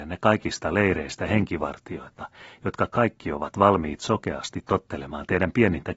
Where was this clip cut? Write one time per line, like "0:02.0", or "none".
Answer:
none